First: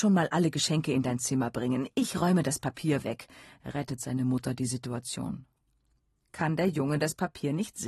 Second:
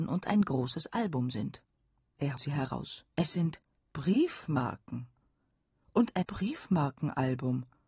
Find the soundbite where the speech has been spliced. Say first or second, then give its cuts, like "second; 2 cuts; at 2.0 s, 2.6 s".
second; 4 cuts; at 2.4 s, 3.1 s, 3.8 s, 6.2 s